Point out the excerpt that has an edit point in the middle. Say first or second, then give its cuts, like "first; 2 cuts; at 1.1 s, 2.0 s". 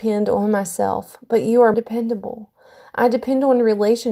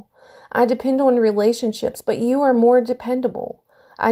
first; 1 cut; at 1.7 s